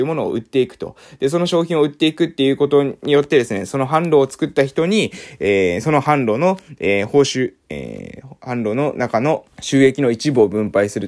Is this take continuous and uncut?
no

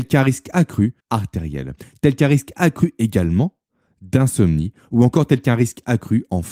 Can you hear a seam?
yes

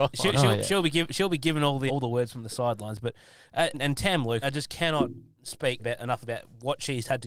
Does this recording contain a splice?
yes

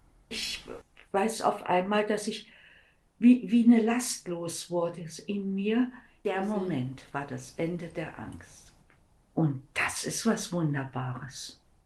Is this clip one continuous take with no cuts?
yes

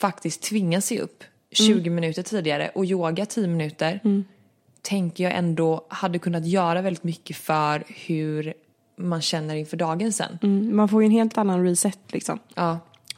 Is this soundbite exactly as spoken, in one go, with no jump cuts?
yes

